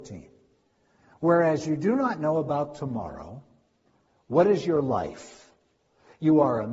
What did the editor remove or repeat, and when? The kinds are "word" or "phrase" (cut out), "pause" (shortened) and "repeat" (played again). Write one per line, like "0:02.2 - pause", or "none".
none